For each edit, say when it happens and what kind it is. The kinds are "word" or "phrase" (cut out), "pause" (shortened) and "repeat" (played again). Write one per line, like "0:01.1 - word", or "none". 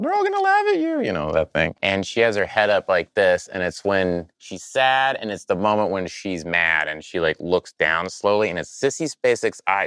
0:01.8 - pause
0:04.3 - pause